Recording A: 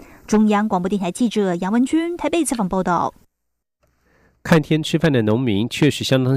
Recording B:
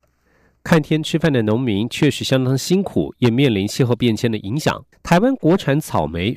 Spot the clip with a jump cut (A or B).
B